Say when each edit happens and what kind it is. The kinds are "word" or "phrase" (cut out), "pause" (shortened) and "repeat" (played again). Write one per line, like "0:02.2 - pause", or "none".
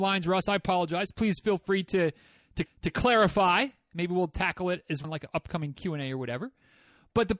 0:02.7 - repeat
0:05.0 - word

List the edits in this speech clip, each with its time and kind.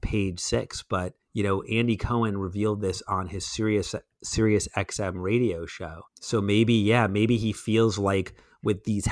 0:01.2 - pause
0:06.1 - pause

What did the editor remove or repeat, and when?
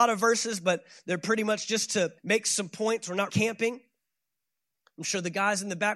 0:02.2 - pause
0:03.3 - word

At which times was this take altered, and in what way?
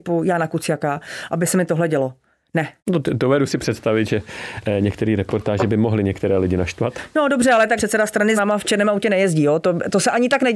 0:02.8 - pause
0:07.8 - word
0:08.4 - word

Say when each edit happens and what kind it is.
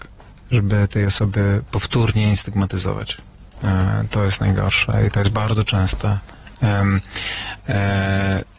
none

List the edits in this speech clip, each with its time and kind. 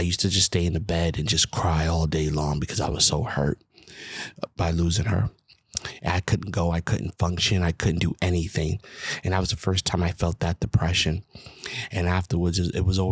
none

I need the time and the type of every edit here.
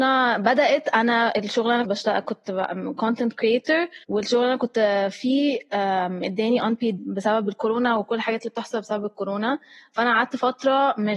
0:01.8 - phrase
0:04.0 - pause
0:07.0 - word

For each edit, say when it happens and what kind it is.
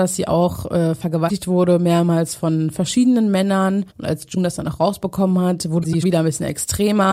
0:03.9 - pause
0:06.0 - word

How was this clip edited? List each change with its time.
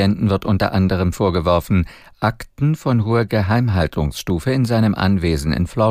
none

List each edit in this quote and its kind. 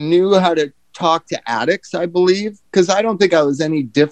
0:02.7 - pause

